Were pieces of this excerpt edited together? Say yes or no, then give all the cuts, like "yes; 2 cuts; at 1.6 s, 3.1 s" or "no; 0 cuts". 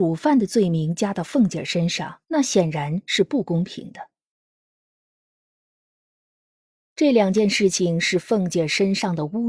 yes; 1 cut; at 2.2 s